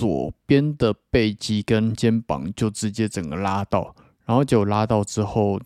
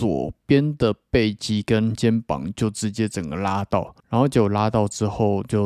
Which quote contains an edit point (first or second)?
second